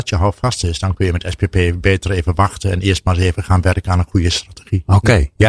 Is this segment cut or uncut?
uncut